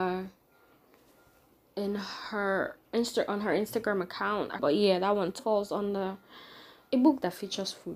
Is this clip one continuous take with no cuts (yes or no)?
no